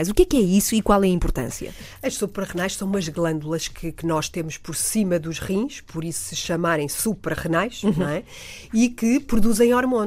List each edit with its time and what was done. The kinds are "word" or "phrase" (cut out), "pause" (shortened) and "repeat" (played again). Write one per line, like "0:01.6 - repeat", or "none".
none